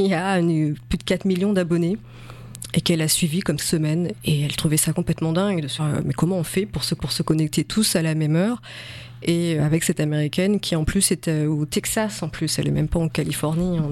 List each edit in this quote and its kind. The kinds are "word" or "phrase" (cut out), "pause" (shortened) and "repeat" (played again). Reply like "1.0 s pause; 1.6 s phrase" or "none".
3.6 s phrase; 5.8 s word; 7.0 s repeat; 9.6 s word